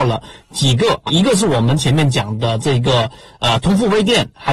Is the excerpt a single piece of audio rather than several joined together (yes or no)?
no